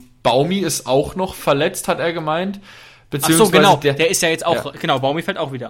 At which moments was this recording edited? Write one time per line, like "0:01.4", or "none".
none